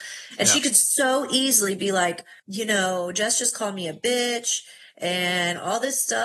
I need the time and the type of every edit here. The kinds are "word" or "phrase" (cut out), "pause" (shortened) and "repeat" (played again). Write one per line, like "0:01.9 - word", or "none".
0:02.4 - pause

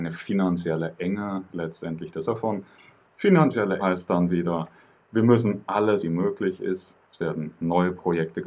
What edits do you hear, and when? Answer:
0:01.5 - word
0:02.2 - word
0:03.8 - word
0:06.0 - phrase
0:07.0 - pause

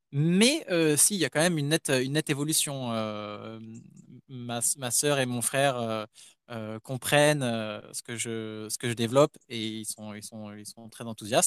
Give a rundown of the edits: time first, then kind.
none

